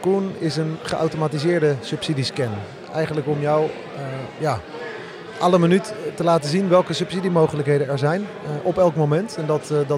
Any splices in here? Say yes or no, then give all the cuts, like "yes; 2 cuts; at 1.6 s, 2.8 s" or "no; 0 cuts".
no; 0 cuts